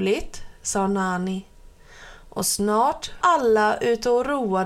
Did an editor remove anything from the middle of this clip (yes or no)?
yes